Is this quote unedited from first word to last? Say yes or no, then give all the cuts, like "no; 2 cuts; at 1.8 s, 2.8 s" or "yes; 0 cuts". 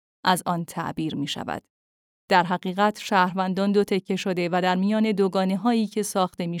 yes; 0 cuts